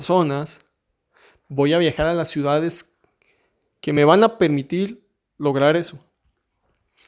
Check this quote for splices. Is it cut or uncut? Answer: uncut